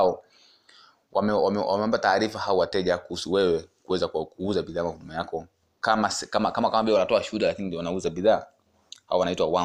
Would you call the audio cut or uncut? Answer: uncut